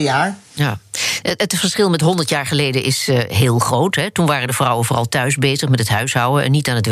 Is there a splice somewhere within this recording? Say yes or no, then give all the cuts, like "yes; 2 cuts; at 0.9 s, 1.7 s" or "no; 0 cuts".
no; 0 cuts